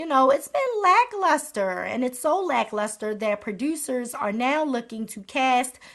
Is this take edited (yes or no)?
no